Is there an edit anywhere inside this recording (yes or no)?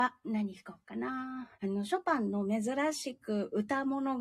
yes